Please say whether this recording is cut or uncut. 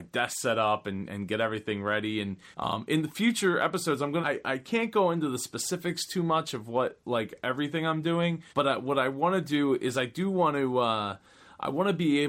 cut